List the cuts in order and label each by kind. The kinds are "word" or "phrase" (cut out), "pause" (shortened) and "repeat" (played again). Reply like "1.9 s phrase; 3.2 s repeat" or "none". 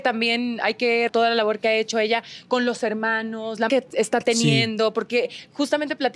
1.1 s word; 3.7 s word